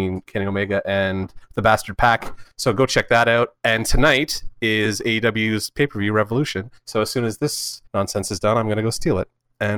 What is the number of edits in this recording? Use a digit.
3